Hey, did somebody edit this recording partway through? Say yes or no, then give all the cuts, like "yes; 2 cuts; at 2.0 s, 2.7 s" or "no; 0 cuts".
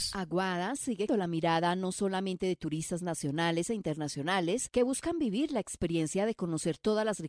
yes; 1 cut; at 1.1 s